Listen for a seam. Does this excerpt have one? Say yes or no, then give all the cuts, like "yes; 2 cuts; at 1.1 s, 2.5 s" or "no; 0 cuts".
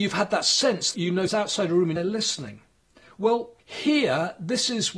yes; 4 cuts; at 0.9 s, 1.3 s, 2.0 s, 3.6 s